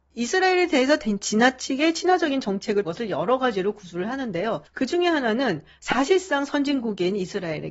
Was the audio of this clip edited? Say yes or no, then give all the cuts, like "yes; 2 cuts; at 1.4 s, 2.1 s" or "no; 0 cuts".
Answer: yes; 1 cut; at 2.8 s